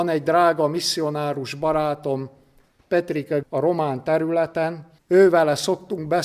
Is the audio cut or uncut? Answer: cut